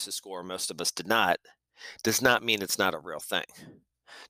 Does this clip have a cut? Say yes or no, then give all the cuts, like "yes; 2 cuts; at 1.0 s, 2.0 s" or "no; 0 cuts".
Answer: no; 0 cuts